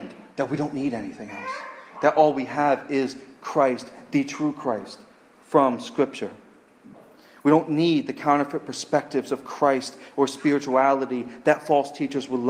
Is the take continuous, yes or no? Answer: yes